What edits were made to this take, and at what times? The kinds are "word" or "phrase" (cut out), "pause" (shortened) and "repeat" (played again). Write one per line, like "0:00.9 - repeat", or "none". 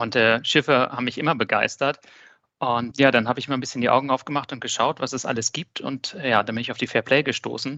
none